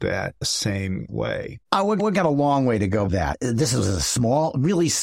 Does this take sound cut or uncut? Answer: cut